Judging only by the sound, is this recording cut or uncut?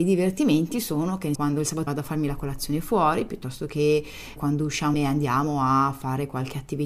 cut